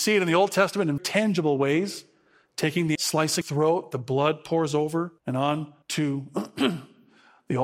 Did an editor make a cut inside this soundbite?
yes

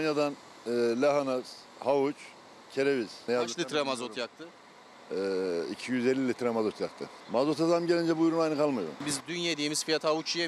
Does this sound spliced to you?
yes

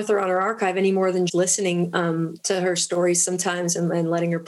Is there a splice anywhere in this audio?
yes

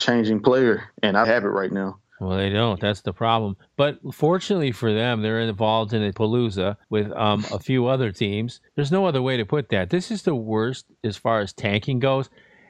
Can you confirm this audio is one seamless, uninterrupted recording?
no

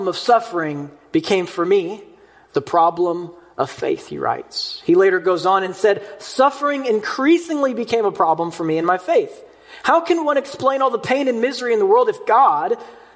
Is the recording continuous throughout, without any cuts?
yes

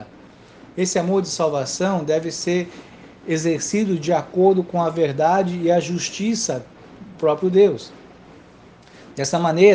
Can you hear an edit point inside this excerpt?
yes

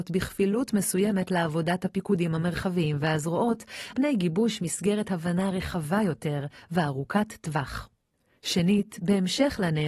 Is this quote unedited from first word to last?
no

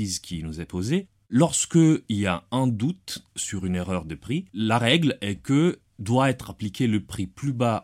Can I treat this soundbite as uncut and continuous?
no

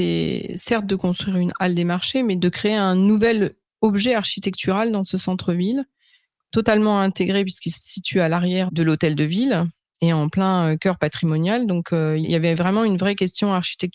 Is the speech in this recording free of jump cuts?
yes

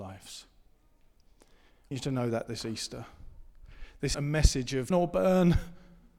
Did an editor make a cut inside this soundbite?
yes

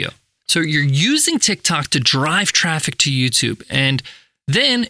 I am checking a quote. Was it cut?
no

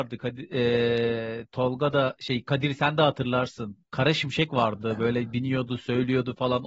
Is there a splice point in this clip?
yes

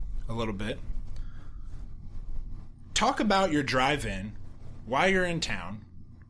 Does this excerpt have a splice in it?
no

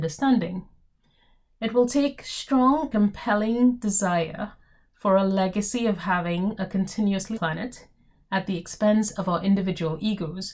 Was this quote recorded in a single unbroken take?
no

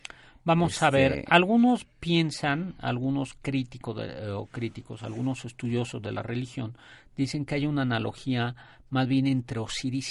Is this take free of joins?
yes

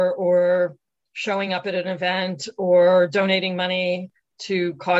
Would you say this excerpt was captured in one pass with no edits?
yes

